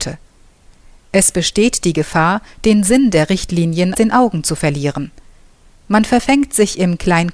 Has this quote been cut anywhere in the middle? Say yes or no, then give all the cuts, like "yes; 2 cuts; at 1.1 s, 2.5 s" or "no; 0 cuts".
yes; 1 cut; at 3.9 s